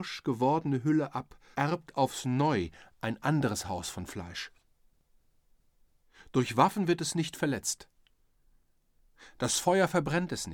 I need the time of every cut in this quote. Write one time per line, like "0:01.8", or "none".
0:01.5